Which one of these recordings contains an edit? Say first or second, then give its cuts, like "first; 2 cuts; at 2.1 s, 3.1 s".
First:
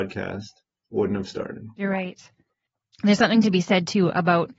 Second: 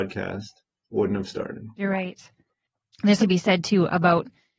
second; 1 cut; at 3.2 s